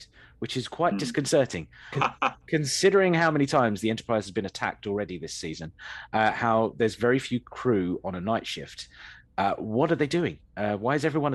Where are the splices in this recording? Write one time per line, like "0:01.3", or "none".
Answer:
0:01.9